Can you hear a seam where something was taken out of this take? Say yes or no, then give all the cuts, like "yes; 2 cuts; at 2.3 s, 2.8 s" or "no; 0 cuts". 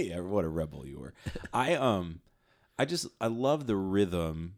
no; 0 cuts